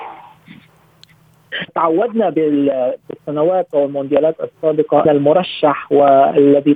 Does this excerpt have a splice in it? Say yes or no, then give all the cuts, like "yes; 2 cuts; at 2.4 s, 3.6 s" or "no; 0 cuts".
yes; 3 cuts; at 1.7 s, 3.7 s, 5.1 s